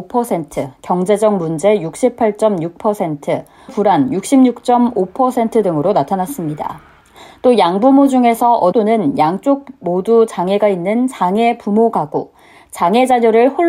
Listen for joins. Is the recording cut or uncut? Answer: cut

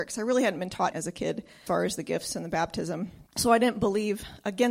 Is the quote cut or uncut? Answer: cut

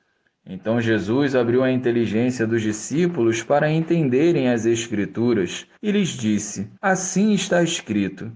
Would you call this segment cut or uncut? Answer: cut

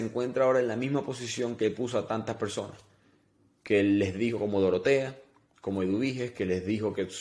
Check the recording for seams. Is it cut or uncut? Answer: uncut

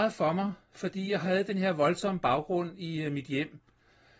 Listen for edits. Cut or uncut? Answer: uncut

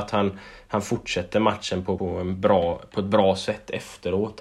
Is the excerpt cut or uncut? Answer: cut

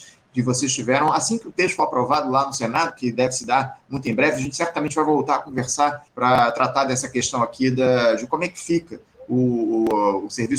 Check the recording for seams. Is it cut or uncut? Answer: cut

